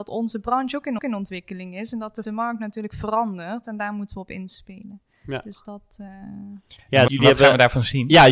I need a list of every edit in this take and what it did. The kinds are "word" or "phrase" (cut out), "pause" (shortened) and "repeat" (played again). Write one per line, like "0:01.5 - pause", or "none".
0:01.0 - repeat
0:02.2 - phrase
0:07.1 - word